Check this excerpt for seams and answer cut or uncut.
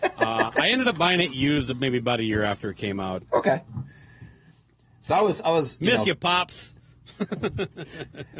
uncut